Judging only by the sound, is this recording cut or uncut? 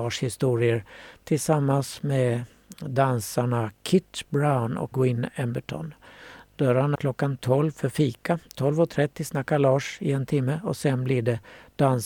cut